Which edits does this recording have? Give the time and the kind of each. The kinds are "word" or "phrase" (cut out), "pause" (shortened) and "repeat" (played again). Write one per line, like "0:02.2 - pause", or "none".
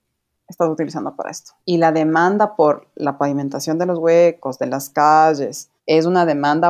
0:01.6 - pause
0:05.8 - pause